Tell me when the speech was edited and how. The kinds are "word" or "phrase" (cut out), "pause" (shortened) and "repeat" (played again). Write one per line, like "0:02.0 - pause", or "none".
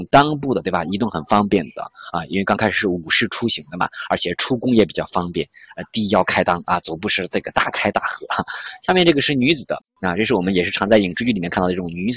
none

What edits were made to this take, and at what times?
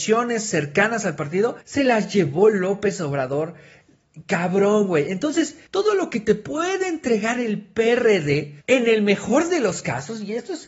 0:01.6 - pause
0:05.7 - pause
0:08.6 - pause

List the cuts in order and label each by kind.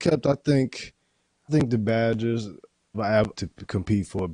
0:01.5 - word
0:02.9 - word
0:03.3 - word

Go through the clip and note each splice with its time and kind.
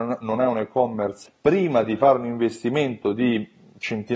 0:01.3 - word

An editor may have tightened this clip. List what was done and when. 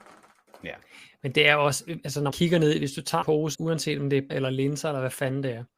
0:02.3 - word
0:03.2 - word
0:03.5 - word
0:04.3 - word

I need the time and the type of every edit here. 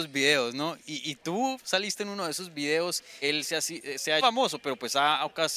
0:03.2 - word
0:04.2 - phrase

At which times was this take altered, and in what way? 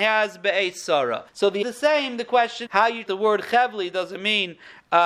0:01.3 - pause
0:01.6 - phrase
0:02.7 - word
0:03.1 - word

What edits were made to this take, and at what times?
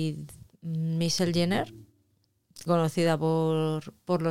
0:02.7 - word

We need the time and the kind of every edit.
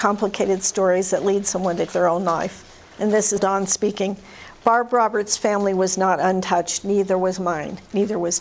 0:01.9 - word
0:02.9 - pause
0:03.4 - word

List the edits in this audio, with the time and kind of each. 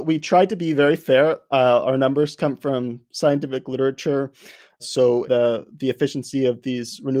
0:05.2 - phrase

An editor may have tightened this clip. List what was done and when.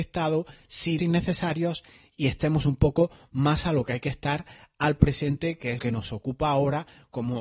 0:01.0 - word
0:05.8 - word

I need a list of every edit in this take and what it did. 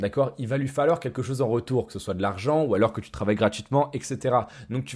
none

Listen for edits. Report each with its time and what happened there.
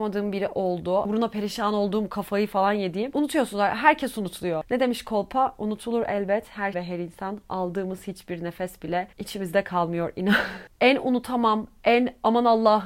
0:06.7 - word
0:09.1 - pause

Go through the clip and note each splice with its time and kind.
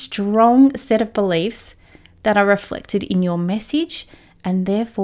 none

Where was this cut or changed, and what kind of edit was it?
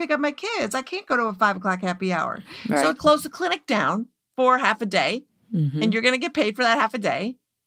0:03.0 - phrase

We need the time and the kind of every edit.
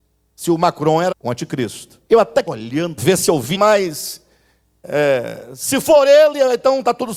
0:01.1 - word
0:02.1 - pause
0:02.5 - word
0:03.0 - phrase
0:03.5 - phrase

